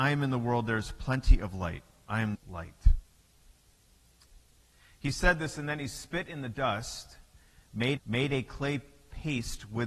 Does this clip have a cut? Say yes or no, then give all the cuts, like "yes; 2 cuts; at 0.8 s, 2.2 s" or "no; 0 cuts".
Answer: yes; 2 cuts; at 2.3 s, 8.0 s